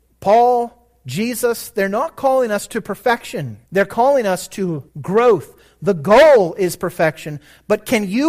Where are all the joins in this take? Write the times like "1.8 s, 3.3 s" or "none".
3.7 s, 4.9 s